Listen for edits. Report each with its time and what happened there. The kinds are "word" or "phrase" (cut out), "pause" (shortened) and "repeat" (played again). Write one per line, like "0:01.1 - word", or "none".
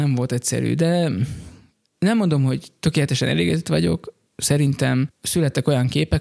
0:04.3 - word